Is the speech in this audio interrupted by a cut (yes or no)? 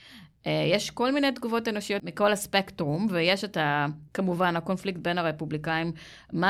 yes